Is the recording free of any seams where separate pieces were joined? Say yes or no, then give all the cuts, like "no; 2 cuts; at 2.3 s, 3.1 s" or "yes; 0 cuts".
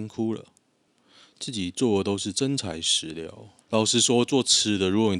no; 1 cut; at 3.6 s